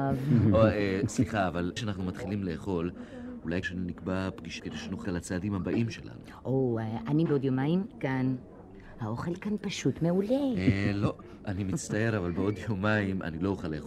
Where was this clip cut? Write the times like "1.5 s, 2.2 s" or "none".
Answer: 1.8 s, 3.6 s, 4.6 s, 5.0 s, 7.3 s